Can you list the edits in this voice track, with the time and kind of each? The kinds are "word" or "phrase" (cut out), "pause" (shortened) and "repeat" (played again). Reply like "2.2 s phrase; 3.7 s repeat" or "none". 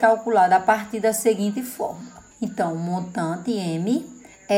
2.3 s pause